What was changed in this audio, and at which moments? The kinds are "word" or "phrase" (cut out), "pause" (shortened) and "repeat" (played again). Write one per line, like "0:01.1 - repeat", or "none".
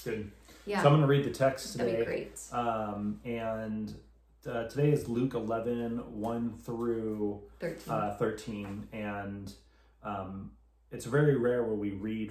none